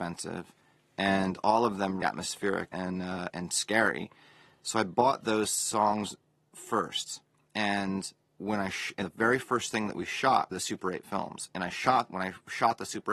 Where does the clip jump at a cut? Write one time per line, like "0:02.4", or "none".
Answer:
0:02.0
0:02.7
0:03.3
0:09.0
0:10.5